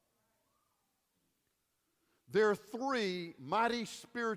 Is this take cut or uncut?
uncut